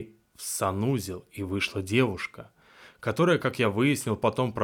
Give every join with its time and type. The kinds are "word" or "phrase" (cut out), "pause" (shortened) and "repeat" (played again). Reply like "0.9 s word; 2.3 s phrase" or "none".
none